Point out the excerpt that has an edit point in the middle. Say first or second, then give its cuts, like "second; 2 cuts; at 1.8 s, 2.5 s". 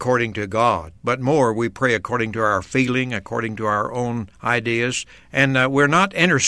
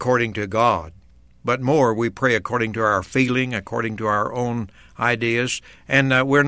first; 2 cuts; at 1.0 s, 4.3 s